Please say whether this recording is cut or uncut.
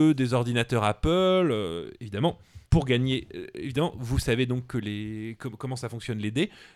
cut